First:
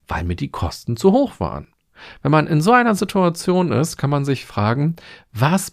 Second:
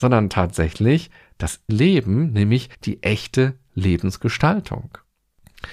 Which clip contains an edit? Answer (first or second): second